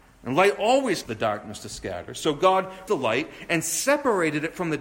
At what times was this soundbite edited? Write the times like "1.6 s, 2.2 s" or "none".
1.0 s, 2.9 s